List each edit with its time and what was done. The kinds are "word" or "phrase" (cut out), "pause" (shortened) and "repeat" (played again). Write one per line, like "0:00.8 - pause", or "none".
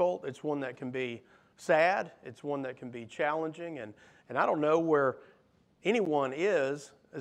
none